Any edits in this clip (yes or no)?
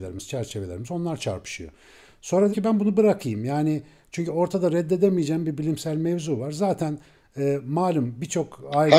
yes